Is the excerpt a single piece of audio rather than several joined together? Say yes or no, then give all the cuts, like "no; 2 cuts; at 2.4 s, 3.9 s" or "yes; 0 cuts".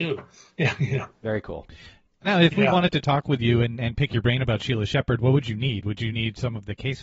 yes; 0 cuts